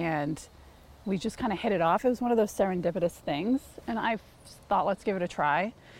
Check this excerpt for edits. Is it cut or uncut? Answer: uncut